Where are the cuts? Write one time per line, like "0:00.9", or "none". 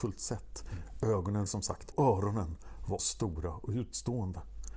0:01.5
0:01.9
0:03.0